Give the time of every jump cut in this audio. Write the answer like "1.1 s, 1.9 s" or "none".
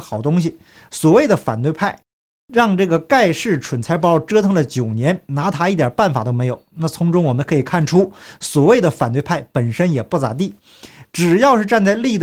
none